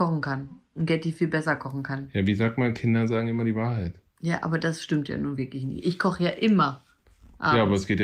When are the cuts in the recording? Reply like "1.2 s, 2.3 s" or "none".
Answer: none